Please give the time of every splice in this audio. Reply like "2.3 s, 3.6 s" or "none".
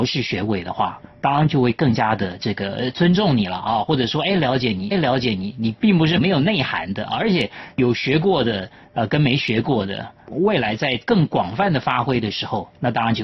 4.9 s